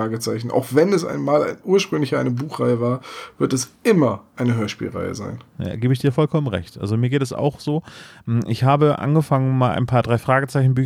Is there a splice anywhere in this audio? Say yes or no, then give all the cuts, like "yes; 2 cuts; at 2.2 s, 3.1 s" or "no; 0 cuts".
yes; 2 cuts; at 3.8 s, 5.5 s